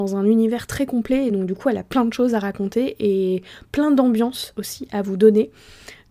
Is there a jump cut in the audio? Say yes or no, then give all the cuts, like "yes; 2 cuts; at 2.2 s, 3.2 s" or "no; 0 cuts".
no; 0 cuts